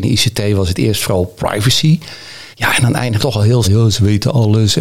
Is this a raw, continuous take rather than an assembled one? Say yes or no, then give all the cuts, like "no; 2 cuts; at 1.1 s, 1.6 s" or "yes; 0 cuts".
no; 3 cuts; at 2.5 s, 3.2 s, 3.6 s